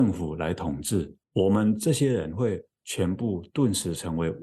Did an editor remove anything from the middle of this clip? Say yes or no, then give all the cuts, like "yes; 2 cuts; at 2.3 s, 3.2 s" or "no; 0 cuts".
yes; 1 cut; at 1.2 s